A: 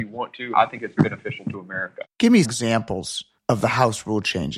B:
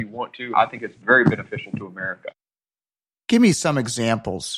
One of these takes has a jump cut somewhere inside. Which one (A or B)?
A